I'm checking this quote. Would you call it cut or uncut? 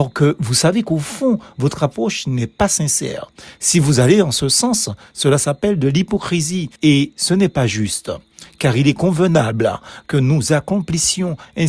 cut